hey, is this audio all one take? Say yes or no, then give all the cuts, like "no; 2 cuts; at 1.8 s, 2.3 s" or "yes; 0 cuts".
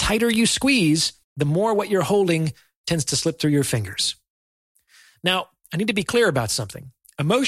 no; 1 cut; at 1.2 s